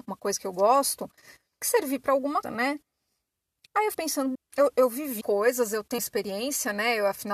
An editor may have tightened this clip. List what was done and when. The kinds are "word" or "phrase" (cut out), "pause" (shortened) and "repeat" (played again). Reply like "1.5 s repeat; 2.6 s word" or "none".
1.6 s word; 2.4 s word; 3.9 s word; 4.3 s word; 5.2 s word; 6.0 s word